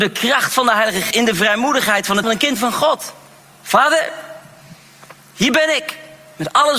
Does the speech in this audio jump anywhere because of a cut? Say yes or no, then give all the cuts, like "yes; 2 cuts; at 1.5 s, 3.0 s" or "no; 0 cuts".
yes; 3 cuts; at 1.1 s, 2.2 s, 3.4 s